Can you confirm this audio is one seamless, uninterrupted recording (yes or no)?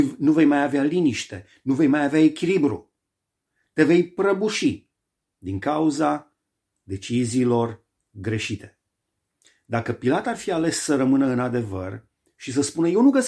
yes